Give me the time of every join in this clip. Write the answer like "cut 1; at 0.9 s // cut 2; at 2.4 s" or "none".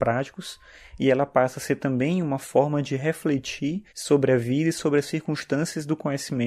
cut 1; at 3.9 s